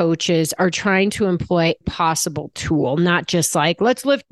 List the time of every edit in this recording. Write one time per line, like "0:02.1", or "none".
0:01.8